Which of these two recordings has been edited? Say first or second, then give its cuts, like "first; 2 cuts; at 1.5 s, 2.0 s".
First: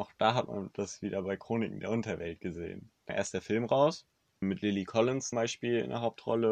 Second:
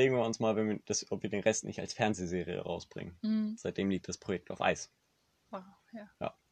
first; 3 cuts; at 3.1 s, 4.4 s, 5.3 s